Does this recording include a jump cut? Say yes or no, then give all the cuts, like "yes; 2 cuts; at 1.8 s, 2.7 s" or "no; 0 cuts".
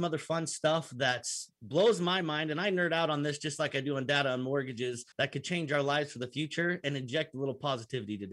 yes; 1 cut; at 5.1 s